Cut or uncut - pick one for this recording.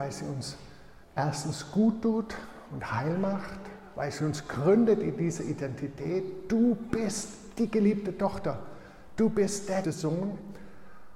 cut